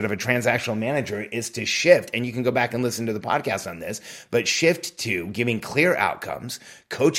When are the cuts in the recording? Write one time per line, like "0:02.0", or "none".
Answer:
none